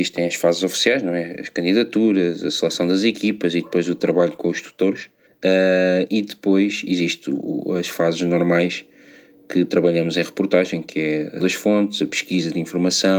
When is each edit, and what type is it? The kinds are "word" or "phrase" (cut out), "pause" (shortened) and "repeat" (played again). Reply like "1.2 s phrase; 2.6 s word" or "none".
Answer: 5.3 s pause; 11.4 s word